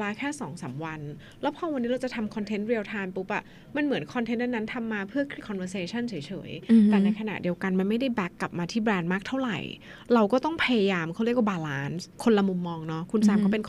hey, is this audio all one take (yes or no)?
no